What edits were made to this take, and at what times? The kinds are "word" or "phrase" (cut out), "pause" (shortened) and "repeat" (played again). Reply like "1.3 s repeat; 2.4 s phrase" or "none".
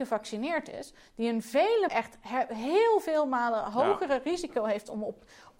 1.9 s word